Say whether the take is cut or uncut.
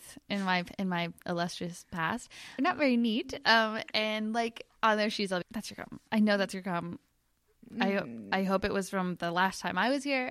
cut